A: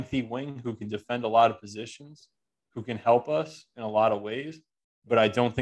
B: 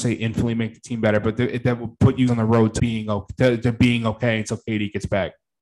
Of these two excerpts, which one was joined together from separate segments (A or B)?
B